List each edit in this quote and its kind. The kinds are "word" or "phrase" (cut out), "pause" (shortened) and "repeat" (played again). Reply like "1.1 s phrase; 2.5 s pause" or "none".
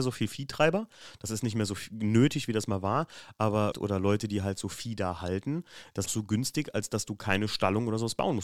3.7 s word; 6.1 s phrase